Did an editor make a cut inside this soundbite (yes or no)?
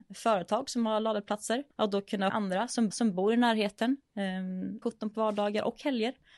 yes